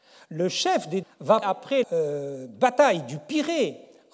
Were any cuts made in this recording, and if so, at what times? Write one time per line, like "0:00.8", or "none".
0:01.0
0:01.4
0:01.8